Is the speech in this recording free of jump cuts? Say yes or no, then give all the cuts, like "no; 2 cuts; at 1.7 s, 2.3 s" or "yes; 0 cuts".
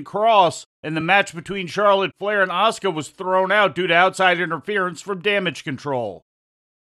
yes; 0 cuts